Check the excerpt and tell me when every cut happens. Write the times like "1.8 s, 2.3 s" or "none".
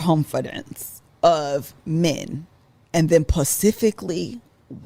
none